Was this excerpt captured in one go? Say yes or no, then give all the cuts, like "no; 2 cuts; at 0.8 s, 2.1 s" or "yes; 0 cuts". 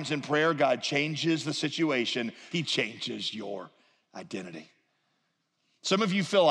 no; 1 cut; at 2.5 s